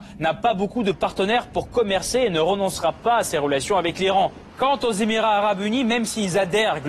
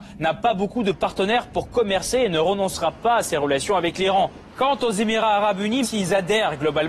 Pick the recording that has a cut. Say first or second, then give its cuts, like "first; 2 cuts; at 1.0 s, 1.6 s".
second; 1 cut; at 5.8 s